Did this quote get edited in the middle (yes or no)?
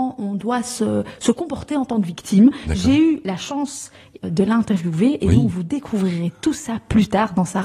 yes